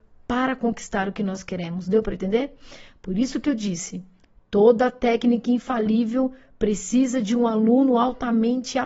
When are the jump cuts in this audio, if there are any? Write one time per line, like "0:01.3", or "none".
none

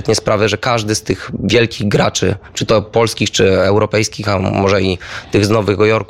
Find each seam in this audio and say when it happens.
none

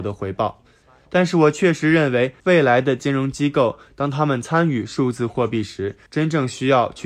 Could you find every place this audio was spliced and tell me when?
0:02.4
0:06.1

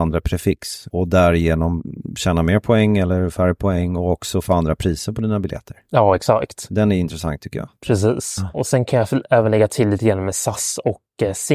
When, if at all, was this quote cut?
0:00.9

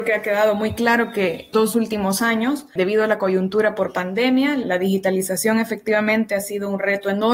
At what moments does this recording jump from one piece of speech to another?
0:01.5

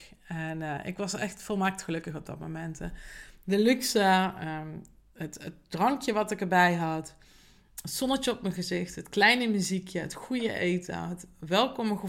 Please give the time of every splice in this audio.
none

